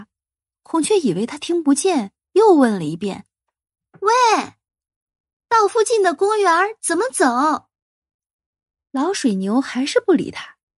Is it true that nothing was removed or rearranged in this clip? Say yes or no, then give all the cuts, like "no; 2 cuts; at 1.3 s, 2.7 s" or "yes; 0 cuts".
yes; 0 cuts